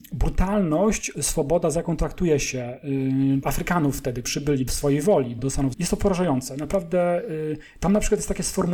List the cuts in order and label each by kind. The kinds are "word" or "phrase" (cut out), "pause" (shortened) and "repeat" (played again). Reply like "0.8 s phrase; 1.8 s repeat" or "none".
1.1 s word; 3.4 s phrase; 4.2 s word; 4.7 s phrase; 5.4 s word; 5.7 s word